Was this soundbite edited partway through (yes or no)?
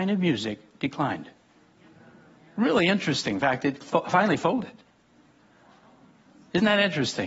no